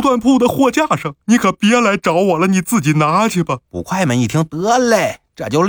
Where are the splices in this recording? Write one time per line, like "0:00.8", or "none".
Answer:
0:01.2
0:03.6